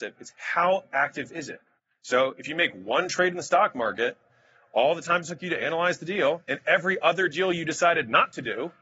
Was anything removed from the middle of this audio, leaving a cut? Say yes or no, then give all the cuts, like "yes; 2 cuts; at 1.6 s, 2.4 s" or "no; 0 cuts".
no; 0 cuts